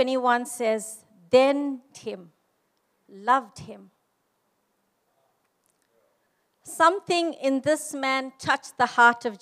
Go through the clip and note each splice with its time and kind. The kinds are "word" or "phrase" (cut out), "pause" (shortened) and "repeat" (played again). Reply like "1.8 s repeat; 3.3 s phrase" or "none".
1.9 s phrase